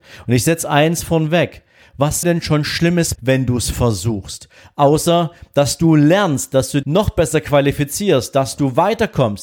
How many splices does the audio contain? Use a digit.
3